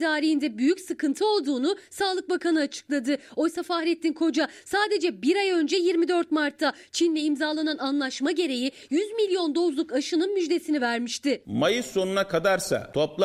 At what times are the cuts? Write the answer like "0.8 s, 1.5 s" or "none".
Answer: none